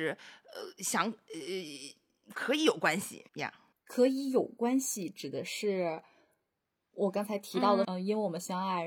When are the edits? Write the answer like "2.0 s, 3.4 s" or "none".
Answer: 3.3 s, 3.7 s, 7.8 s